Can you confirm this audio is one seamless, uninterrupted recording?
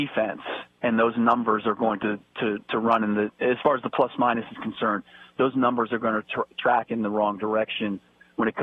yes; 0 cuts

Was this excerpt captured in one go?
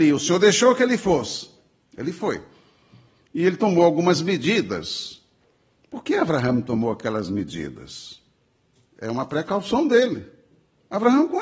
yes; 0 cuts

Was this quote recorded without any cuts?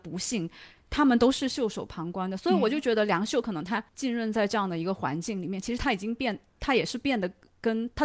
no; 1 cut; at 3.9 s

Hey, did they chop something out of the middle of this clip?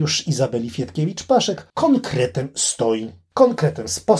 yes; 1 cut; at 1.7 s

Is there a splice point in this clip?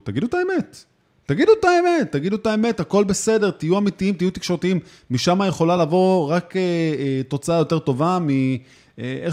no; 0 cuts

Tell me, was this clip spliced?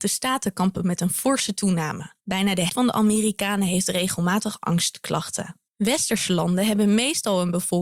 yes; 3 cuts; at 2.2 s, 2.7 s, 5.7 s

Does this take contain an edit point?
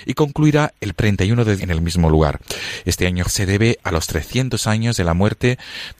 yes; 3 cuts; at 1.0 s, 1.6 s, 3.2 s

